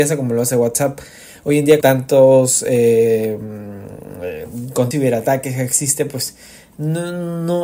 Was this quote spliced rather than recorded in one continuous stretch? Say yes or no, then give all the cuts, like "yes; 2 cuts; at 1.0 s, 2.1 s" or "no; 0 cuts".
yes; 2 cuts; at 1.8 s, 4.9 s